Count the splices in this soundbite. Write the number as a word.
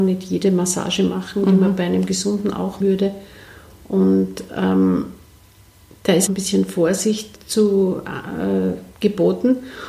three